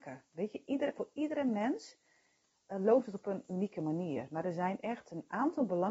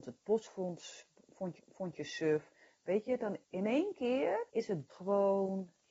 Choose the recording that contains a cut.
second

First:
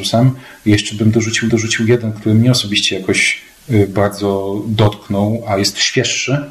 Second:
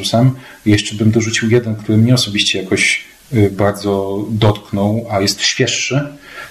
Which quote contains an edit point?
first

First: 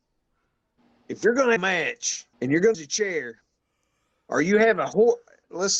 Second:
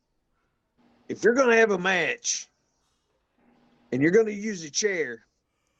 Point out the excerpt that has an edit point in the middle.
first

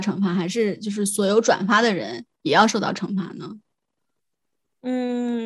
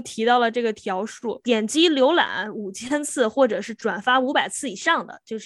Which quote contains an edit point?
first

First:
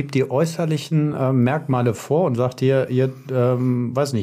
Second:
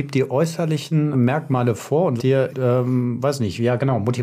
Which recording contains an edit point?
second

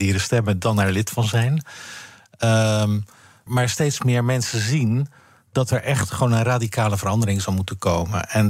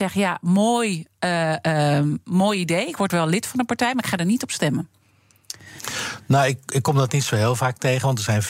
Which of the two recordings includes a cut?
first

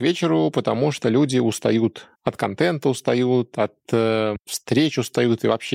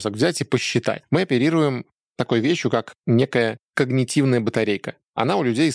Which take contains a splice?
first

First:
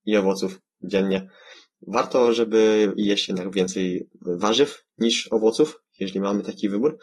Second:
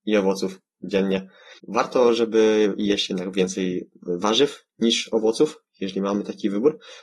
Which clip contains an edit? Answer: second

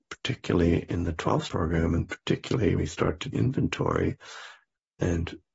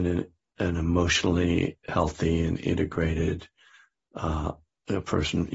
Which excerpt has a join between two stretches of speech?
first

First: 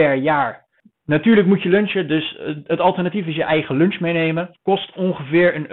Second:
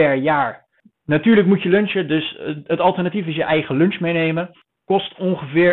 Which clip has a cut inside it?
first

